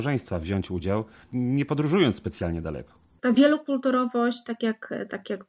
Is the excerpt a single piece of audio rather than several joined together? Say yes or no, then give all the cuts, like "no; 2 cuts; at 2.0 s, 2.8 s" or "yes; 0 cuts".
yes; 0 cuts